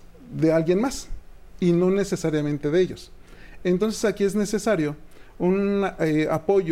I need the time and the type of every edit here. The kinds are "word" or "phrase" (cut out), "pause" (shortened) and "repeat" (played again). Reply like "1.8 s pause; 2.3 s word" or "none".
none